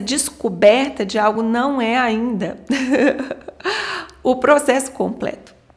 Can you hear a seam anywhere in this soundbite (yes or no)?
no